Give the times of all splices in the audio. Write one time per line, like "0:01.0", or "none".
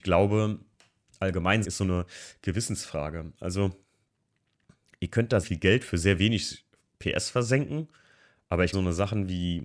0:01.6
0:05.4
0:08.7